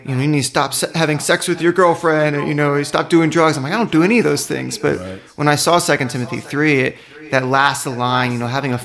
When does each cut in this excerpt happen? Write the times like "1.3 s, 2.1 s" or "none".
none